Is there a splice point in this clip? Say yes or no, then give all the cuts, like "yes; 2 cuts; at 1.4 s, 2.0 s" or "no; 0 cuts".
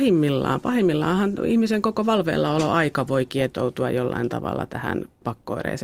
no; 0 cuts